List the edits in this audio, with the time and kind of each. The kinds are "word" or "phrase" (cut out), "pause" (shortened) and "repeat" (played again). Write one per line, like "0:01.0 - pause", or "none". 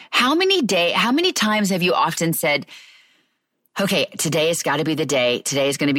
none